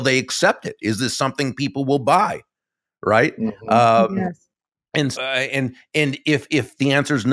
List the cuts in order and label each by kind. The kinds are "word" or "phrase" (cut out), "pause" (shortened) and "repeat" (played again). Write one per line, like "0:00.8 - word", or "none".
0:05.1 - word